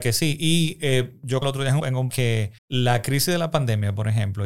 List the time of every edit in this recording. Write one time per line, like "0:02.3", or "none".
0:01.4
0:01.8
0:02.1
0:02.6